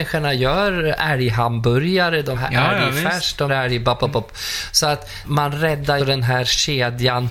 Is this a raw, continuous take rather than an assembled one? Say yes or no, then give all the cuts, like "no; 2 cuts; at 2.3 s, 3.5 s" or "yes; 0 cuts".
no; 4 cuts; at 2.3 s, 3.5 s, 5.2 s, 6.0 s